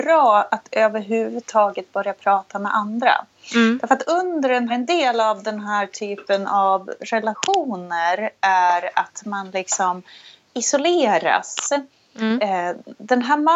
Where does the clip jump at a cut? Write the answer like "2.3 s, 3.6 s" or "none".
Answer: 4.7 s